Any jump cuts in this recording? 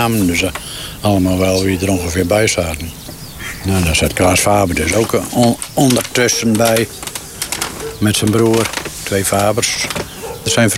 no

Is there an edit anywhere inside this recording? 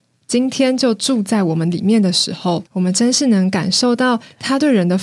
yes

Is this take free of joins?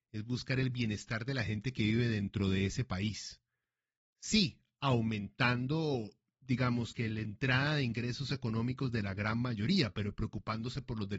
yes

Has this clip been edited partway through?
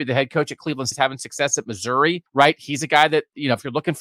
yes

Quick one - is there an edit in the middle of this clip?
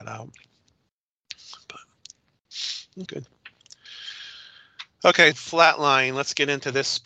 yes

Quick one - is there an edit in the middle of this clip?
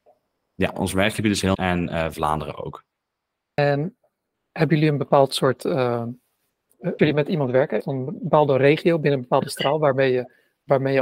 yes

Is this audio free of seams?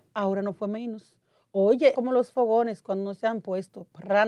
no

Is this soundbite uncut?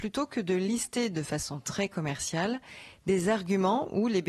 yes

